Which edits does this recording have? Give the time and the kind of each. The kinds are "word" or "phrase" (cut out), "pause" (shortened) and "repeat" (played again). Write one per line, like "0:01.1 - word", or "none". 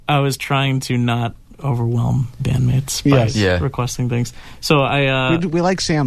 0:02.4 - word